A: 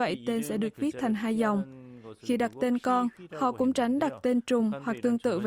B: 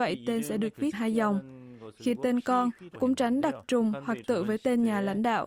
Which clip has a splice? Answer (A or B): B